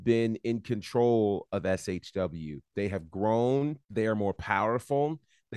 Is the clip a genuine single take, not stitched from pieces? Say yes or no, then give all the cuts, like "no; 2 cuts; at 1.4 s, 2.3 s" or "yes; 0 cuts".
no; 2 cuts; at 2.6 s, 3.8 s